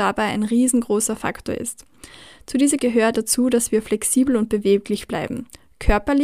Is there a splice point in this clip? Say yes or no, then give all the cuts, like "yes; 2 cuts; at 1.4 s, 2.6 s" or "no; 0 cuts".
yes; 2 cuts; at 2.8 s, 3.1 s